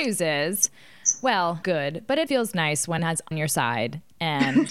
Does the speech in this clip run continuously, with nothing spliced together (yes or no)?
no